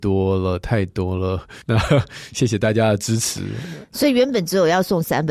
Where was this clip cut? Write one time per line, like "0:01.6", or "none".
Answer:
0:01.6